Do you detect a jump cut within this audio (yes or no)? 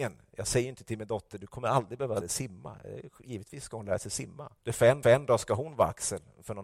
yes